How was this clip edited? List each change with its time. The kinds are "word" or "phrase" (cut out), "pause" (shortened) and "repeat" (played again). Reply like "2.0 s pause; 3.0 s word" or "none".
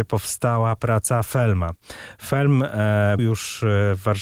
3.2 s word